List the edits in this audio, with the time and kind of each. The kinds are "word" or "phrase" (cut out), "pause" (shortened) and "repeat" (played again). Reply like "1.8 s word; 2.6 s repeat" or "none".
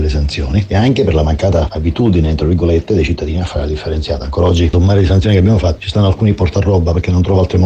4.7 s word